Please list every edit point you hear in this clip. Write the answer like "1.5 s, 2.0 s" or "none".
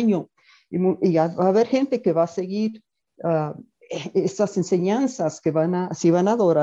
none